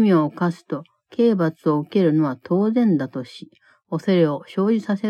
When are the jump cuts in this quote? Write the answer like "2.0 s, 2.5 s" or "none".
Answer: none